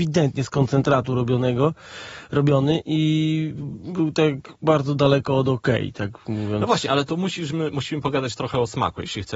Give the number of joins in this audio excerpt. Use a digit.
0